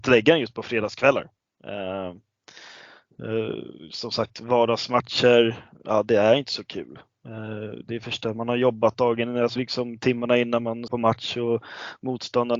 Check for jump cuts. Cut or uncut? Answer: cut